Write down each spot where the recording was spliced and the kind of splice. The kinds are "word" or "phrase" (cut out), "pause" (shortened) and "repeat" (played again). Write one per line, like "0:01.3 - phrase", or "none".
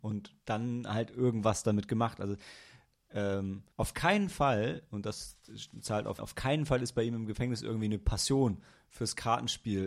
0:03.7 - pause
0:06.2 - phrase